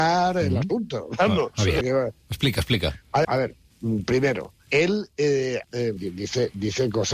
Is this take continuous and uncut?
no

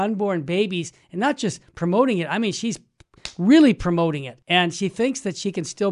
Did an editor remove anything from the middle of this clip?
yes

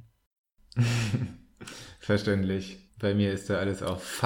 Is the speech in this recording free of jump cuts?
no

